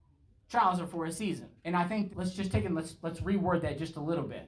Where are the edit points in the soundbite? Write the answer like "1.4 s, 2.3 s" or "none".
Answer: 1.6 s, 2.1 s